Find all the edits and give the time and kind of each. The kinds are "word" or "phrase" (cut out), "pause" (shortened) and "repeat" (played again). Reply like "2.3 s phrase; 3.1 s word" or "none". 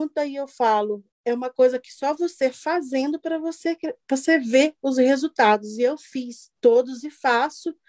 1.1 s pause; 6.6 s pause